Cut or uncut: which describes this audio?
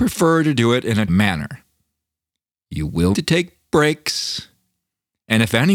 cut